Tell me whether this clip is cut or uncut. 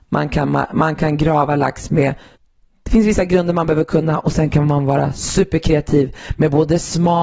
cut